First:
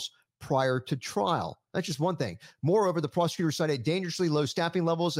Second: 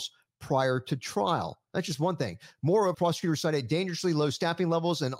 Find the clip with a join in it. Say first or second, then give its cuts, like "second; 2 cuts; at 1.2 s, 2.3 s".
second; 1 cut; at 2.9 s